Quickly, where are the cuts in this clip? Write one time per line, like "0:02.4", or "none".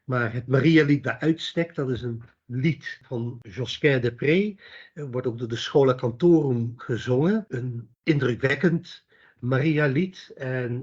0:07.9

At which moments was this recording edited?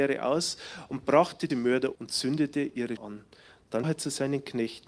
0:01.5
0:01.9
0:03.0
0:03.8

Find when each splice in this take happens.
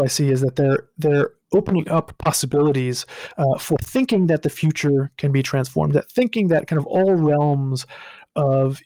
none

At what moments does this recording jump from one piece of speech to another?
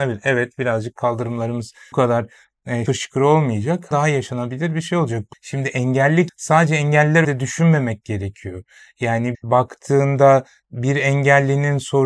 0:01.9
0:02.9
0:03.9
0:05.3
0:06.3
0:07.2
0:09.3

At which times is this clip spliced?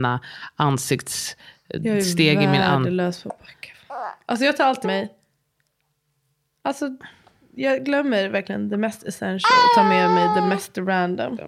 0:04.8

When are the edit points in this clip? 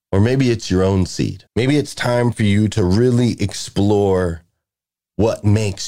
0:01.5

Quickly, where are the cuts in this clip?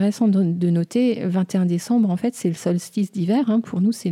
none

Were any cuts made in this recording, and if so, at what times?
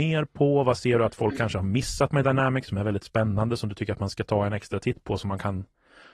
none

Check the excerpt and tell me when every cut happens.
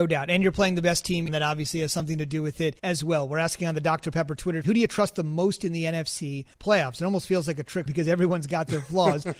0:01.3
0:02.8
0:04.6
0:06.5
0:07.9

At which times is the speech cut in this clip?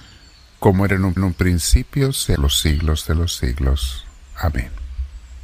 0:01.2
0:02.4

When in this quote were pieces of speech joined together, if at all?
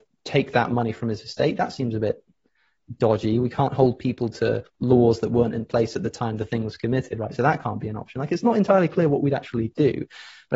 none

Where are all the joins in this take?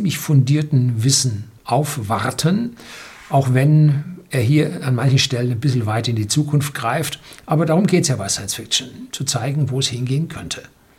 0:01.6

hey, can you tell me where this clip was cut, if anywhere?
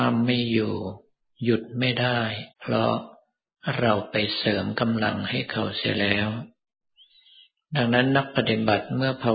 0:02.5

